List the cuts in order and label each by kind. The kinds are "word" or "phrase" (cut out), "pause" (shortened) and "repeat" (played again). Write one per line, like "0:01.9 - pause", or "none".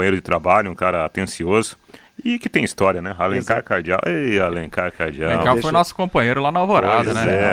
none